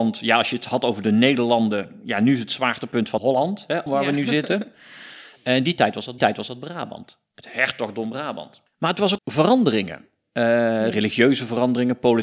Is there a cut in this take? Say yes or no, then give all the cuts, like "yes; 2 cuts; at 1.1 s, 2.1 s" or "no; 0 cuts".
yes; 4 cuts; at 3.2 s, 3.9 s, 6.2 s, 9.2 s